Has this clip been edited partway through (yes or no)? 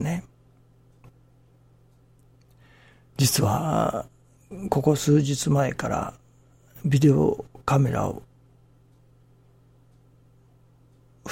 no